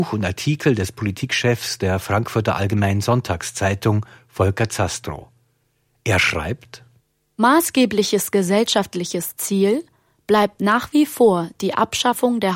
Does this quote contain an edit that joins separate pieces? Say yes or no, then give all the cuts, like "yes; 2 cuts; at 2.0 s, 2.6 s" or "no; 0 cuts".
no; 0 cuts